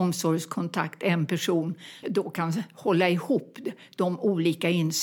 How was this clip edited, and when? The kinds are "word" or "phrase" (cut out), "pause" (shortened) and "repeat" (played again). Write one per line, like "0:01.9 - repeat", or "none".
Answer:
0:02.0 - word